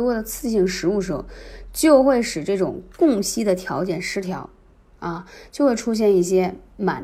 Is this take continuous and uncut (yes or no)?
yes